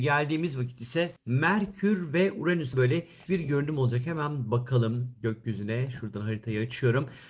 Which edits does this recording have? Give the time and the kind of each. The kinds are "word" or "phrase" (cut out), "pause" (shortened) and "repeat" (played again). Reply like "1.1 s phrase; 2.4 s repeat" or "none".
1.2 s pause; 2.7 s word; 3.3 s word